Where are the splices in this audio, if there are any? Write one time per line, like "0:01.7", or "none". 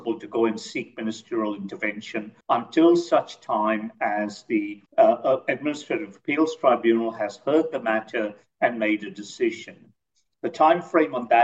0:02.4
0:04.9